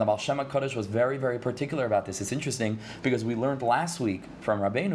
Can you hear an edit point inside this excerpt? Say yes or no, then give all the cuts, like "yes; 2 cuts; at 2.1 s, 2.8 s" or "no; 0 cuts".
no; 0 cuts